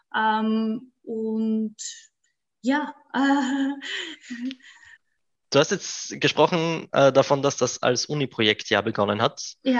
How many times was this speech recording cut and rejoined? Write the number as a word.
one